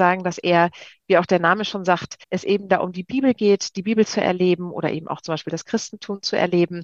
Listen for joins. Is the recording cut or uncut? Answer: cut